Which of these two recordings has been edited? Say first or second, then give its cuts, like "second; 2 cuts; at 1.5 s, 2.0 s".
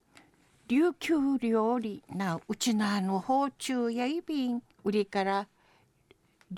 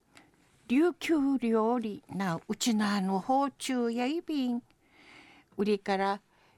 first; 1 cut; at 4.7 s